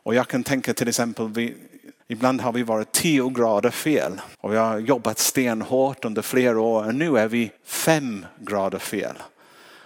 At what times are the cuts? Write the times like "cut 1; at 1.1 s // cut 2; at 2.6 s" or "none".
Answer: cut 1; at 2.0 s // cut 2; at 4.3 s // cut 3; at 7.6 s